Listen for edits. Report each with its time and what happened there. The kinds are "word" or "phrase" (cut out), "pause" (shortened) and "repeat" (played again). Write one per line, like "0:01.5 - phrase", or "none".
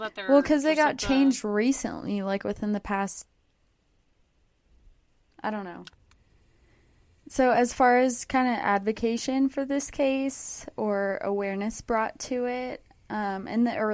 none